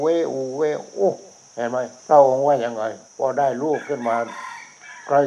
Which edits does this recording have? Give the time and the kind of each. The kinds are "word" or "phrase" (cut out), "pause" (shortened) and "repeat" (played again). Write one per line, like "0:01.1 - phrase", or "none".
0:01.5 - pause
0:02.0 - pause
0:03.0 - pause